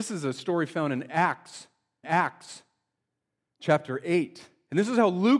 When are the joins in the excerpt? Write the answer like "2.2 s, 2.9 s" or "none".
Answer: 2.0 s